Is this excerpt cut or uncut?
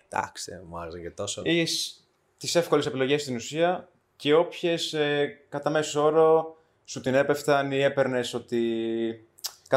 uncut